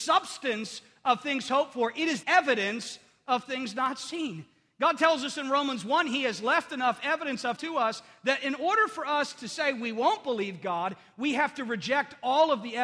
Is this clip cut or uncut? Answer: cut